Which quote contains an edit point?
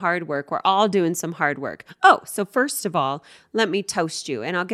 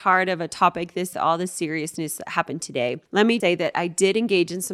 second; 3 cuts; at 1.1 s, 3.1 s, 3.4 s

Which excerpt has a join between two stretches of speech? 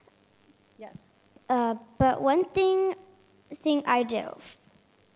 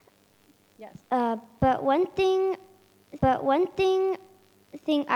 second; 2 cuts; at 1.0 s, 3.2 s

